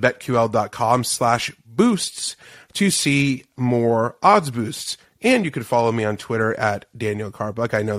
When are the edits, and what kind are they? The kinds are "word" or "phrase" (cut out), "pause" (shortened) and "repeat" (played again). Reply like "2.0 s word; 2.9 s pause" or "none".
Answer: none